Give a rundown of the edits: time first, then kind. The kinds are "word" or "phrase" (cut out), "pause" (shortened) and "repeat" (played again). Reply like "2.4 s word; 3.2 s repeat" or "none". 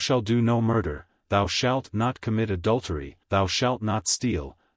3.2 s pause